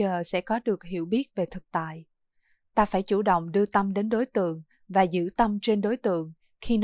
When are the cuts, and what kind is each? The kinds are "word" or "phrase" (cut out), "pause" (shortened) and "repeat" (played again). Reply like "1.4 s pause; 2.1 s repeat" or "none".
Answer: none